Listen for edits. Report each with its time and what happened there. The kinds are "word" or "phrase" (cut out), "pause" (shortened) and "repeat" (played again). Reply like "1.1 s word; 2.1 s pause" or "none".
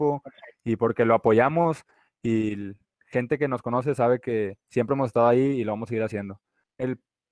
none